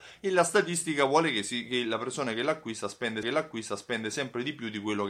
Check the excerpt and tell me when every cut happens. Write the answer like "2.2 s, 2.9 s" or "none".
3.2 s